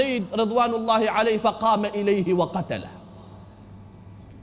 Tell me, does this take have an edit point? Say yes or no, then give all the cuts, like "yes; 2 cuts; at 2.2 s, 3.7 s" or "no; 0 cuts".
no; 0 cuts